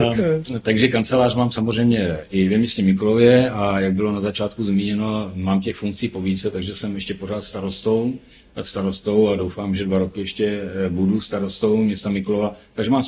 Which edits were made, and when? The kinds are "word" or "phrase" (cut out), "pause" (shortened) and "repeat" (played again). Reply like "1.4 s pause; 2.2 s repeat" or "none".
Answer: none